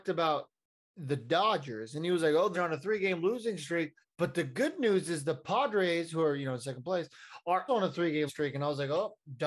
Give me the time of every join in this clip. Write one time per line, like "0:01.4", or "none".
0:02.5
0:04.0
0:07.7
0:08.3